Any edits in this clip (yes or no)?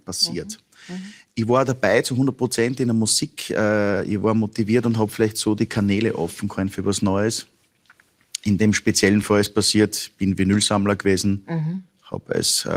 no